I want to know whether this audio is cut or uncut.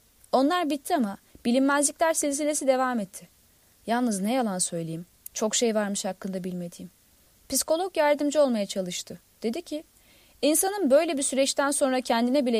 uncut